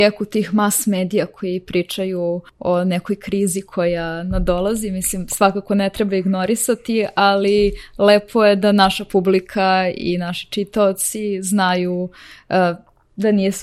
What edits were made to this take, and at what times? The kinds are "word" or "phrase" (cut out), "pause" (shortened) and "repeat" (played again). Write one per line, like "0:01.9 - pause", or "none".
0:02.5 - pause